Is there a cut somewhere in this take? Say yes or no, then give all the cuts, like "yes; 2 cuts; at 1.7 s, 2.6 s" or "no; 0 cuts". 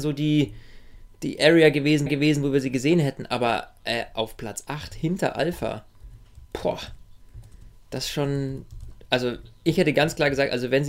yes; 2 cuts; at 2.1 s, 6.4 s